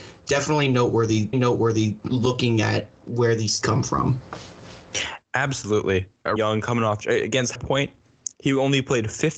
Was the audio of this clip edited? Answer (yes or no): yes